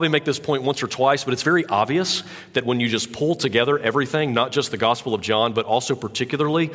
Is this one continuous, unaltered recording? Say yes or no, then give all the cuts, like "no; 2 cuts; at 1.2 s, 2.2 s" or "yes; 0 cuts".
yes; 0 cuts